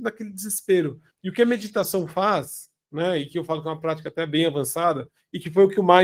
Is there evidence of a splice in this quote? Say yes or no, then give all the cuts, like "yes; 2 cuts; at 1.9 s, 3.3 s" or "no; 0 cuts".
yes; 1 cut; at 1.1 s